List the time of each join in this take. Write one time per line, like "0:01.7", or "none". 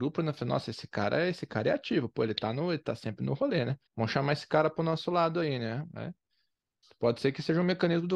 0:03.9